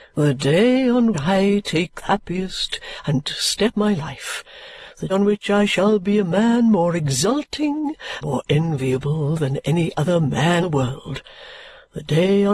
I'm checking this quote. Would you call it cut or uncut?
cut